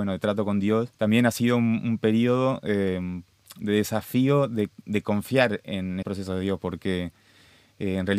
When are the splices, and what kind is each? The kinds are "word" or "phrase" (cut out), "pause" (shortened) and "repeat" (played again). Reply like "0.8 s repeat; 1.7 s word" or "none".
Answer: 0.9 s pause; 6.0 s word